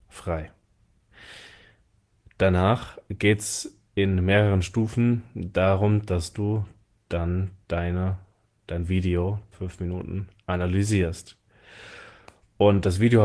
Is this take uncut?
no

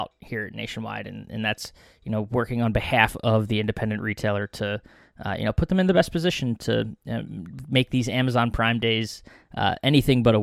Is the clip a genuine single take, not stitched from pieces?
yes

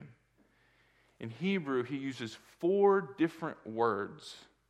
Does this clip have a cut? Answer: no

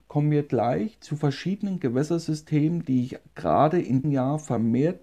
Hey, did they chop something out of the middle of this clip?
yes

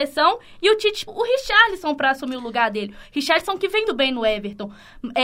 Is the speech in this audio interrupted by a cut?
yes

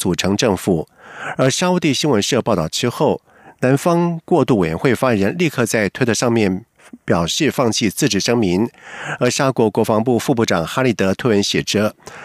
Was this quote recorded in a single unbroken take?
yes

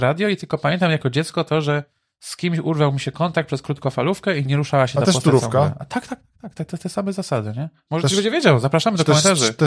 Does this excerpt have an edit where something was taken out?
yes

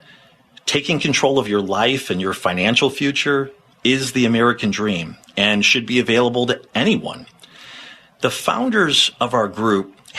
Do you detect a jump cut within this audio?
no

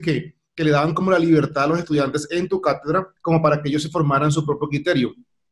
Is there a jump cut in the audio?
yes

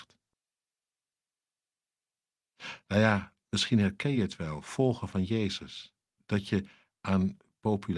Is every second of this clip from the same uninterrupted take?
yes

